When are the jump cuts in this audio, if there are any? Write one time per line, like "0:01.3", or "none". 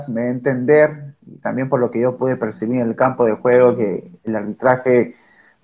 0:04.2